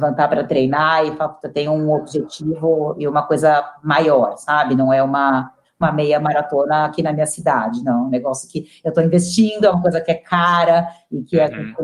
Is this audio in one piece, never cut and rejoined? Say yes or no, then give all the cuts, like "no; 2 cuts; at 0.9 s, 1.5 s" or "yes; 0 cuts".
yes; 0 cuts